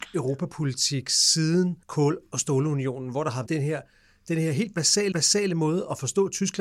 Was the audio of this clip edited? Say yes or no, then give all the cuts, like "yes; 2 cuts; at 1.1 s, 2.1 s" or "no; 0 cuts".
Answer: yes; 3 cuts; at 1.8 s, 3.5 s, 5.1 s